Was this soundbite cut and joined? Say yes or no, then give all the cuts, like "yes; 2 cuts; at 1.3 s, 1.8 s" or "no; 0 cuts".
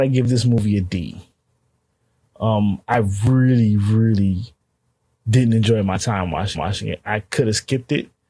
yes; 1 cut; at 6.6 s